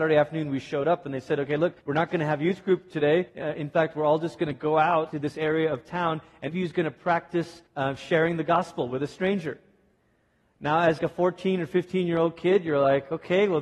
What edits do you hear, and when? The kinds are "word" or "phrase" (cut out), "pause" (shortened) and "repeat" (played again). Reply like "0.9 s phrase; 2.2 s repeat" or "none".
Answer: 1.8 s pause; 3.3 s pause; 5.1 s word; 6.5 s phrase; 7.7 s pause; 11.0 s word